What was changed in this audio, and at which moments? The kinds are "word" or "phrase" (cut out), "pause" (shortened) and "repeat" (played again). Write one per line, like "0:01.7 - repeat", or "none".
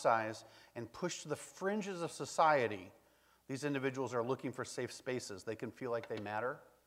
none